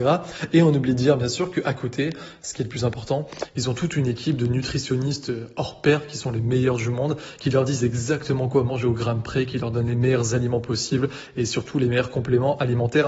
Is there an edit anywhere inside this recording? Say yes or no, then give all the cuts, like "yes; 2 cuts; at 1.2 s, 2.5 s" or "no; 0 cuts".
no; 0 cuts